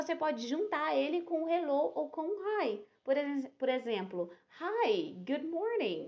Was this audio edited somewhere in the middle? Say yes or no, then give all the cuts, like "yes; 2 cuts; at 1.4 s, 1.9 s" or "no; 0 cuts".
no; 0 cuts